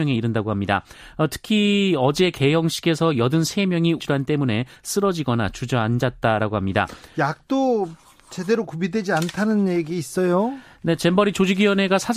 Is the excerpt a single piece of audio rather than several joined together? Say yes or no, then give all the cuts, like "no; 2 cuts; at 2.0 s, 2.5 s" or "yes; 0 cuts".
no; 1 cut; at 4.0 s